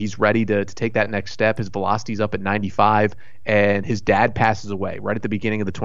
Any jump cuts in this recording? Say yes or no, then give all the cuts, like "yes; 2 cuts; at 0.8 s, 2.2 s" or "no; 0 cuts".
no; 0 cuts